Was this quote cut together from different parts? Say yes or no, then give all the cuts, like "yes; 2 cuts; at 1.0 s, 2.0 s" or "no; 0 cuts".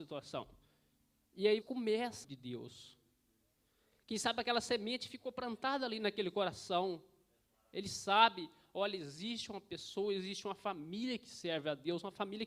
yes; 2 cuts; at 1.6 s, 2.2 s